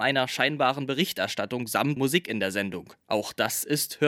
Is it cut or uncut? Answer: cut